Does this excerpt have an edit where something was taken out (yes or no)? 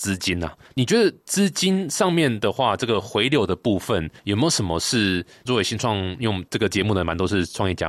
yes